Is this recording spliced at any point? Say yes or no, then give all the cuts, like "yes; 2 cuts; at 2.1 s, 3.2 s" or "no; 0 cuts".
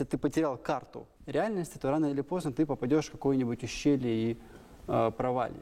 yes; 1 cut; at 1.1 s